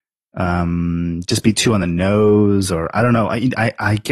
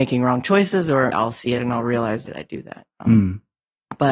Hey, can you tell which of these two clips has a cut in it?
second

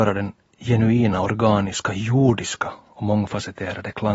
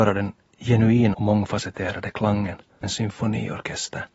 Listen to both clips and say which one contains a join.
second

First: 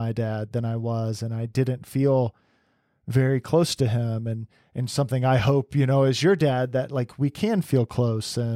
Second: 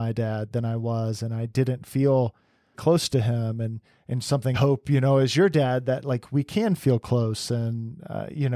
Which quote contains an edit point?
second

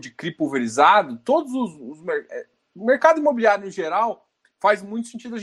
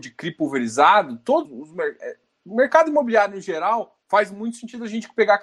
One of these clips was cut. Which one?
second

